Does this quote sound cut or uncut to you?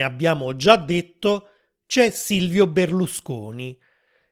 uncut